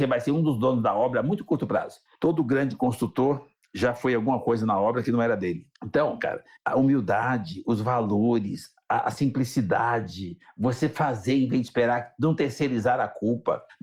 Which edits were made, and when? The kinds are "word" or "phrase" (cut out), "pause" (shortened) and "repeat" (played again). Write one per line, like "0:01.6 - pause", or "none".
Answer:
none